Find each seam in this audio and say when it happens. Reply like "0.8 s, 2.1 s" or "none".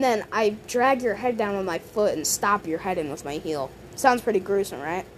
none